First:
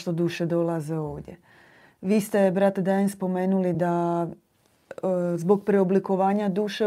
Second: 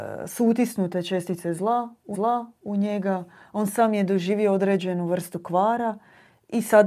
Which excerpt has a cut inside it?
second; 1 cut; at 2.1 s

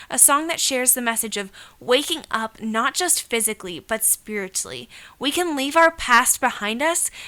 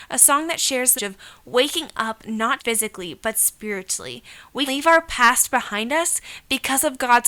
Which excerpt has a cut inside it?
second; 3 cuts; at 1.0 s, 2.6 s, 4.7 s

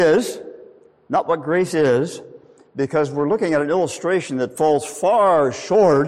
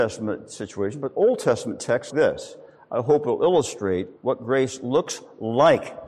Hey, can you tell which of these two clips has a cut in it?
second; 2 cuts; at 2.1 s, 4.2 s

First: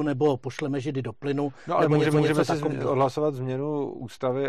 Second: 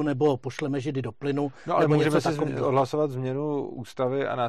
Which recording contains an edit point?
first; 1 cut; at 2.1 s

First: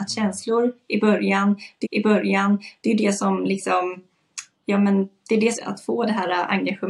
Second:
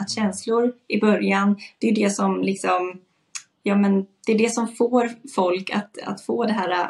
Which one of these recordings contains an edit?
first; 2 cuts; at 1.8 s, 5.5 s

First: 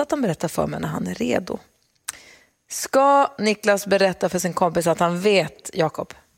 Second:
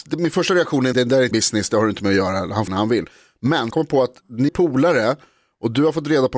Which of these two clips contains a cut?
second; 5 cuts; at 0.9 s, 1.3 s, 2.7 s, 3.7 s, 4.5 s

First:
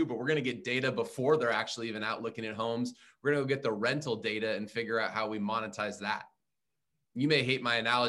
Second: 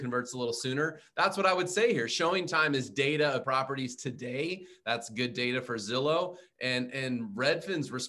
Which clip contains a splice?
second; 1 cut; at 3.4 s

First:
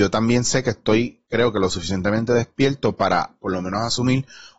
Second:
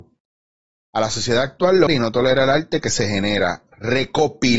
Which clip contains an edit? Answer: second; 1 cut; at 1.9 s

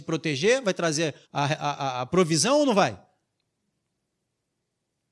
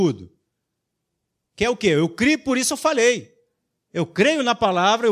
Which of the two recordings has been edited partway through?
first; 1 cut; at 1.2 s

